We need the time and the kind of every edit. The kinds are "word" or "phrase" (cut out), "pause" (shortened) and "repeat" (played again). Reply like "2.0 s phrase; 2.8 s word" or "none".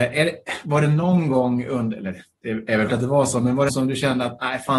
2.9 s word; 3.7 s phrase